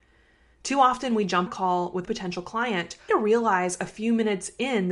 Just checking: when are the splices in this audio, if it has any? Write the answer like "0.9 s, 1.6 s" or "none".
1.5 s, 2.1 s, 3.1 s

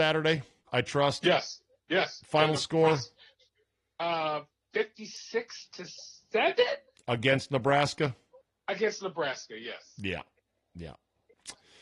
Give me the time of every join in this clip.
none

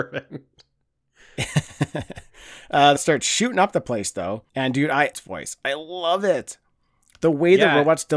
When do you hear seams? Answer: 3.0 s, 4.5 s, 5.1 s

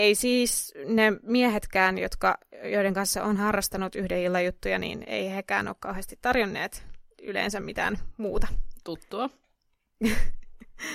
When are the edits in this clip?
7.1 s

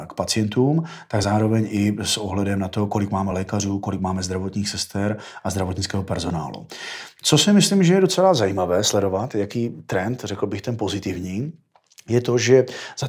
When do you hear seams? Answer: none

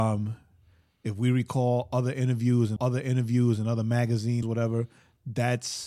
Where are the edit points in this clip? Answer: 2.8 s, 4.4 s

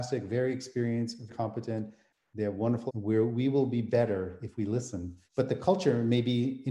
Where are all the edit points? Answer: 1.3 s, 2.9 s, 5.3 s

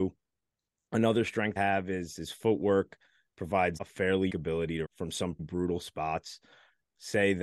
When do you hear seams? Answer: 1.6 s, 3.8 s, 4.3 s, 4.8 s, 5.4 s

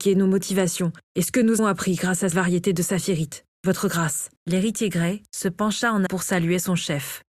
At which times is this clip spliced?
1.0 s, 1.6 s, 2.3 s, 4.4 s, 6.1 s

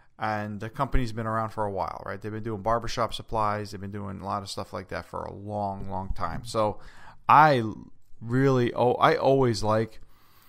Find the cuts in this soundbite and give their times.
none

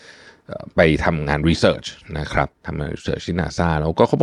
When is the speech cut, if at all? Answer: 2.6 s

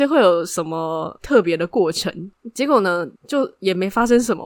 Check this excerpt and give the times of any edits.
3.2 s

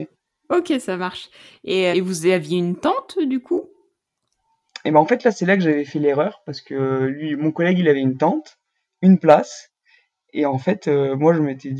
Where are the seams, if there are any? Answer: 1.9 s

